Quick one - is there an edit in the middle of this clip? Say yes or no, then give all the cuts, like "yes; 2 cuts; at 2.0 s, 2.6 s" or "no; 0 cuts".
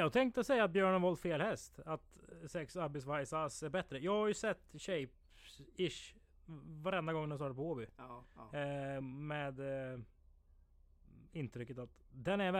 no; 0 cuts